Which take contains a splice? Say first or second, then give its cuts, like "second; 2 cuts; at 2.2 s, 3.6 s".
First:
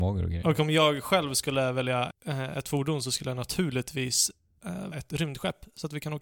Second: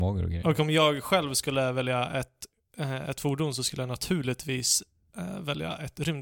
first; 2 cuts; at 2.1 s, 4.9 s